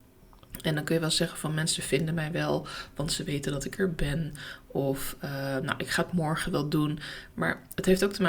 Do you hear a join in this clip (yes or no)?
no